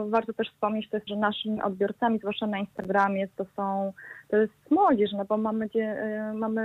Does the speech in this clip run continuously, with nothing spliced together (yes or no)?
no